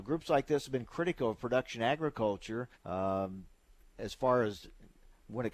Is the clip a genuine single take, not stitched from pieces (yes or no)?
no